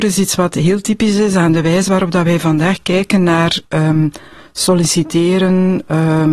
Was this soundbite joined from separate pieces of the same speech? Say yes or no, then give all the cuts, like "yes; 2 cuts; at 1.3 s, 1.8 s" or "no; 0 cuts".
no; 0 cuts